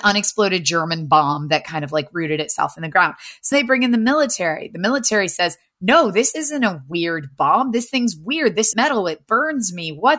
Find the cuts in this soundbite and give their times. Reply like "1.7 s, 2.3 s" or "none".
3.5 s, 8.7 s